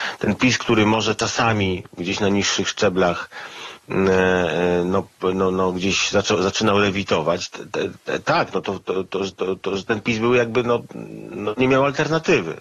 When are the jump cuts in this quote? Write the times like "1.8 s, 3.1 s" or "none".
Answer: 9.3 s